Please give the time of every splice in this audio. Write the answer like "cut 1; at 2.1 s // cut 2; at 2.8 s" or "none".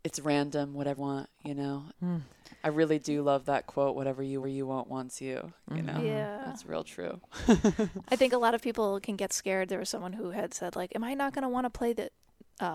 cut 1; at 1.0 s // cut 2; at 1.9 s // cut 3; at 4.4 s